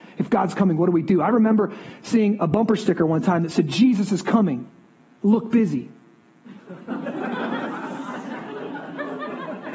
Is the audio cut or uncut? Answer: uncut